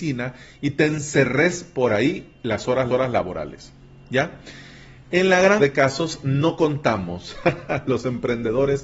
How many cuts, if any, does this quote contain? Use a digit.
2